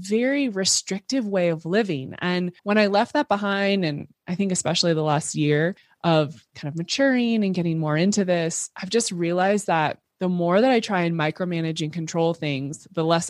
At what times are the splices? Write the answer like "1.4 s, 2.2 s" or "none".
2.6 s